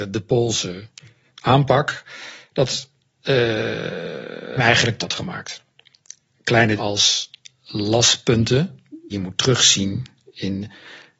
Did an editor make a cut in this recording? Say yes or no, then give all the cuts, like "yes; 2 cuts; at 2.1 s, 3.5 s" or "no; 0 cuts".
yes; 5 cuts; at 1.3 s, 4.6 s, 5.0 s, 6.8 s, 9.1 s